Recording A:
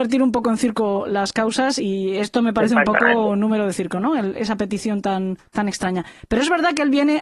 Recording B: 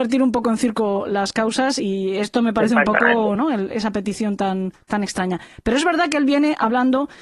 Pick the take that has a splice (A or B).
B